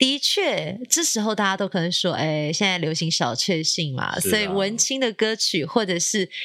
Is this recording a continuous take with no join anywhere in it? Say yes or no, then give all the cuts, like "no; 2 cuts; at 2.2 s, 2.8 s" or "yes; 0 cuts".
yes; 0 cuts